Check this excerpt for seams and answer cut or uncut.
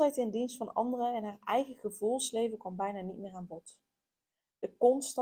uncut